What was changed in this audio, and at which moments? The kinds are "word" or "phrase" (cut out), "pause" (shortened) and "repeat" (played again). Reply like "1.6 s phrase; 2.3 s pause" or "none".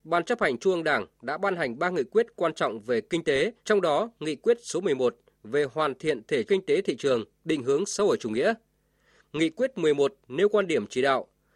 3.6 s pause; 6.5 s word